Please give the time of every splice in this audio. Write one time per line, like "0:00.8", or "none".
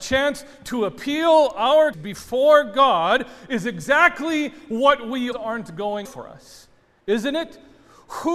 0:01.9
0:05.3
0:06.0

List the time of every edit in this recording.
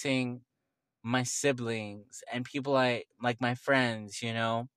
none

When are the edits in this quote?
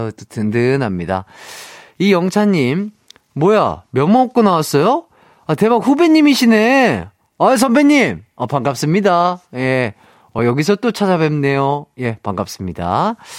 none

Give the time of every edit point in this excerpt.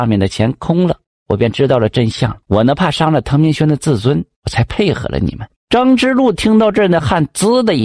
0:02.4
0:05.6

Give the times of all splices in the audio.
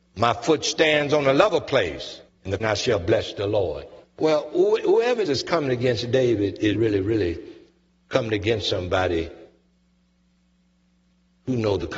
0:02.3
0:02.6
0:04.0
0:05.3
0:06.7

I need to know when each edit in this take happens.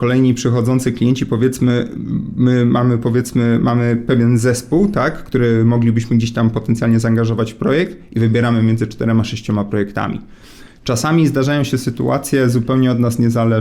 none

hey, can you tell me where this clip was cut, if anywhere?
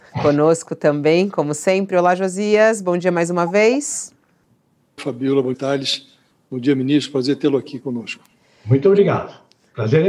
0:05.0
0:05.5

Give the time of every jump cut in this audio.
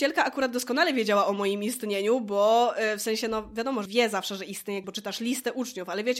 0:03.9
0:04.8

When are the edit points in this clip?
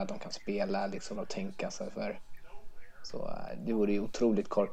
0:01.2

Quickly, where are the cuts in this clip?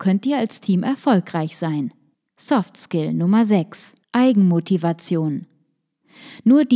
0:02.1
0:04.0

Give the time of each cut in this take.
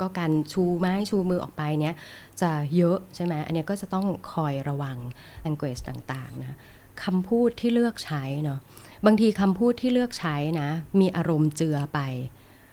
0:05.4

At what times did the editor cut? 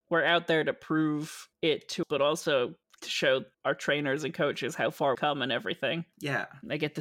0:02.0
0:05.1

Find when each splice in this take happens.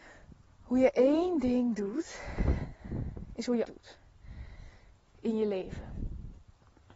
0:03.6

